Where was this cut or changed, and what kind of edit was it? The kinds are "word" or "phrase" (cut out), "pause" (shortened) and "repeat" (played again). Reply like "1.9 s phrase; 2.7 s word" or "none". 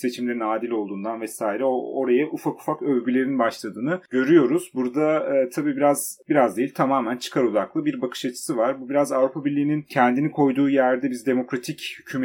none